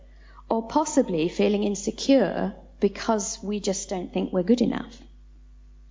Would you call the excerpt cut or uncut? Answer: uncut